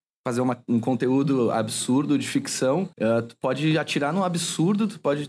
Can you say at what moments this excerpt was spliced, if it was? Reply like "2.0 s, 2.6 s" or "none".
2.9 s